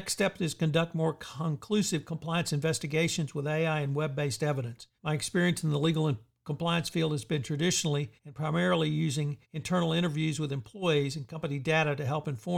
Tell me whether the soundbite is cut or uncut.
cut